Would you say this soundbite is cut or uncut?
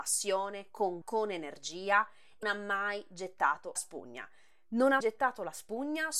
cut